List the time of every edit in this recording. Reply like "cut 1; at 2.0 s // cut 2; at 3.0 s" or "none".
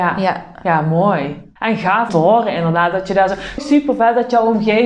cut 1; at 1.6 s // cut 2; at 2.1 s // cut 3; at 3.6 s